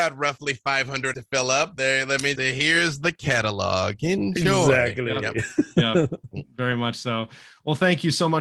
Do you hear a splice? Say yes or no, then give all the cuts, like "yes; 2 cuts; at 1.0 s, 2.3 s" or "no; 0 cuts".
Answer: yes; 2 cuts; at 1.1 s, 2.3 s